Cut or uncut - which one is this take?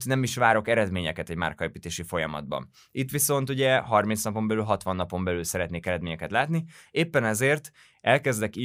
uncut